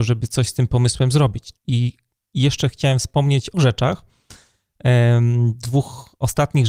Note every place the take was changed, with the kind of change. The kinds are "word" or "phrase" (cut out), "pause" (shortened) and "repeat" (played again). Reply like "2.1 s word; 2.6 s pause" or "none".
1.6 s pause; 3.5 s word

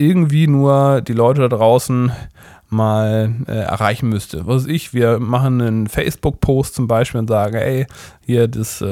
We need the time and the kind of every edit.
none

